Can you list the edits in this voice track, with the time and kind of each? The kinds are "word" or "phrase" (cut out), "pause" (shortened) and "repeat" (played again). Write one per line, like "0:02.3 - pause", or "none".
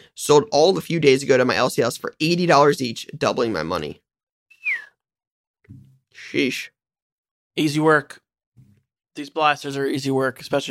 none